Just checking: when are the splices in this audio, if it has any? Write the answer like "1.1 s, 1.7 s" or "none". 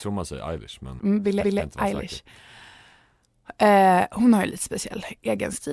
1.0 s, 1.4 s